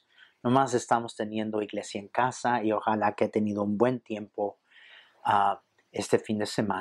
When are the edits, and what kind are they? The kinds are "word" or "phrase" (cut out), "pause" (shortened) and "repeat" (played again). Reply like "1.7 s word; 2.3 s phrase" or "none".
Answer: none

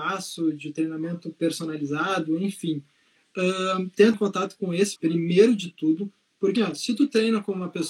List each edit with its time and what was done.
4.1 s word; 5.0 s word; 6.6 s word

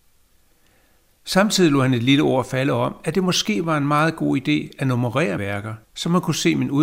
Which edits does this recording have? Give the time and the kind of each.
5.4 s word; 5.8 s pause

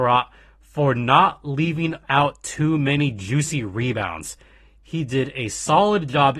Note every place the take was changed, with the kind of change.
none

